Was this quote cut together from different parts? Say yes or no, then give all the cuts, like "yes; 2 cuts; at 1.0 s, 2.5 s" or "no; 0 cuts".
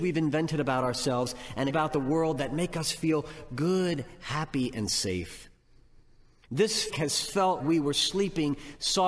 yes; 3 cuts; at 1.7 s, 6.9 s, 7.6 s